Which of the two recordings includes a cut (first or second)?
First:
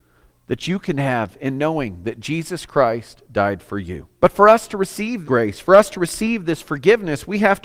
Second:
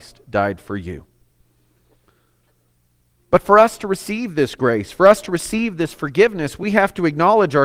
first